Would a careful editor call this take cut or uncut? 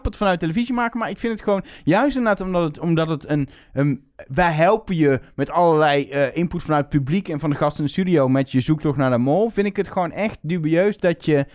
cut